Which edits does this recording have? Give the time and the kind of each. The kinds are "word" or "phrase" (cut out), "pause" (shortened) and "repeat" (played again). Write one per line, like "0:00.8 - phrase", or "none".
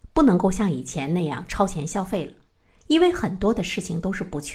none